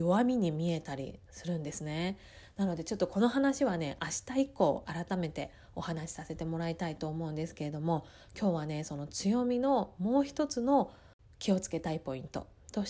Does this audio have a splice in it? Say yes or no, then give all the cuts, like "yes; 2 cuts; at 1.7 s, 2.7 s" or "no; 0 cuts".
no; 0 cuts